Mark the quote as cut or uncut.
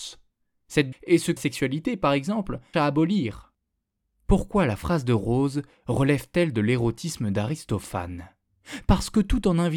cut